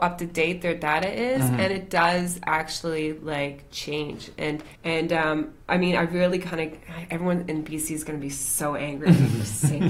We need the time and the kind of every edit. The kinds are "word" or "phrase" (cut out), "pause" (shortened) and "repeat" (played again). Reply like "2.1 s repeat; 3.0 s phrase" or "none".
4.8 s pause; 5.6 s pause